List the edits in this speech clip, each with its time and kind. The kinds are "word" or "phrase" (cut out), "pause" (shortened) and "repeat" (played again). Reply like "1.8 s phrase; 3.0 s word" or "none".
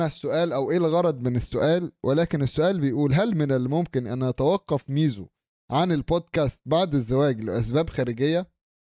none